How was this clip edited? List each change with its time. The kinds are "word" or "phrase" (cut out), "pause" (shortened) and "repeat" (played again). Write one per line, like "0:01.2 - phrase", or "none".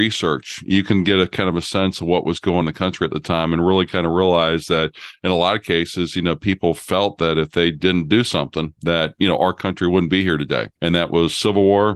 0:02.6 - word
0:08.8 - pause
0:10.8 - pause